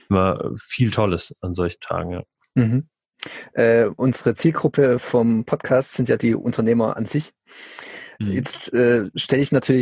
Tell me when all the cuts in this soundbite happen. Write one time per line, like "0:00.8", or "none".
none